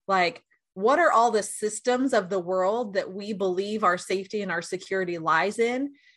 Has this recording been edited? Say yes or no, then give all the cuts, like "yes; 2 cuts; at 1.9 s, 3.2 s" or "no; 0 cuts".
no; 0 cuts